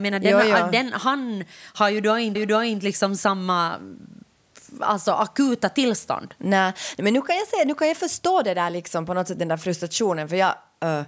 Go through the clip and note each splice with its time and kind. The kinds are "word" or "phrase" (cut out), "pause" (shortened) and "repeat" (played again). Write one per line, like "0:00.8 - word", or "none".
0:02.4 - repeat